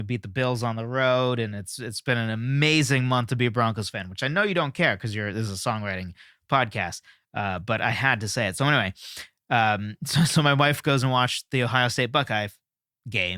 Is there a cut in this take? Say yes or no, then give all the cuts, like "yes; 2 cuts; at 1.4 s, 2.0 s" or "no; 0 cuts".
no; 0 cuts